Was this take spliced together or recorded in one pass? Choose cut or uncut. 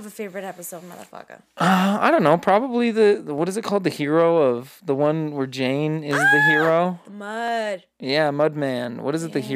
uncut